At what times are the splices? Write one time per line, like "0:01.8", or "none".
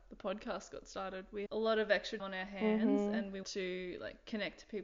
0:01.5
0:02.2
0:03.4